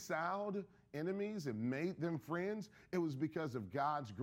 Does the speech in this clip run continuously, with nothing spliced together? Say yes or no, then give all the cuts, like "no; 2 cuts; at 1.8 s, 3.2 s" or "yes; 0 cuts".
yes; 0 cuts